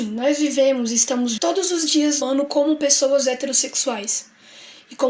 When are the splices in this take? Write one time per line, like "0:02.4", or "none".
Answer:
0:01.4
0:02.2